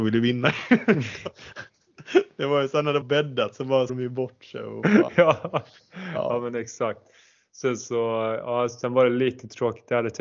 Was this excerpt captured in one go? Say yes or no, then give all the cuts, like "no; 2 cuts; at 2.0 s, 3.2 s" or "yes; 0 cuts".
no; 2 cuts; at 3.0 s, 3.9 s